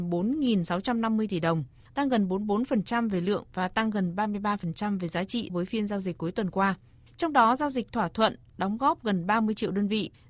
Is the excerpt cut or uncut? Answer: cut